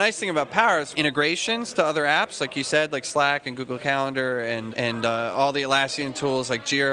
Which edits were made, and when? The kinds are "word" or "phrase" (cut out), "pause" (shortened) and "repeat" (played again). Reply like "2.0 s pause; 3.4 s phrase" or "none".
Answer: 0.9 s phrase; 4.7 s word